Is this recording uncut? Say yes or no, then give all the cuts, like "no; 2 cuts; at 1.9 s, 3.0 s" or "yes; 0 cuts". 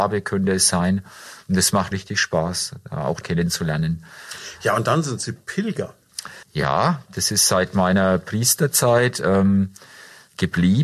no; 3 cuts; at 1.9 s, 3.2 s, 6.4 s